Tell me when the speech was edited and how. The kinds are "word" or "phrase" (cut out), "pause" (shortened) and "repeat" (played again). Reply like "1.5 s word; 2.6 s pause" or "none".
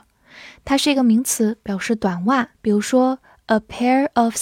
2.5 s pause